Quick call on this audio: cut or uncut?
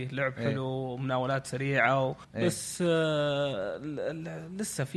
cut